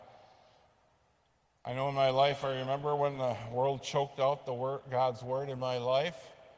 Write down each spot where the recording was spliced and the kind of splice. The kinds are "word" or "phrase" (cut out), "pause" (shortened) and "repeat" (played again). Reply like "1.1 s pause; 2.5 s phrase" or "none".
none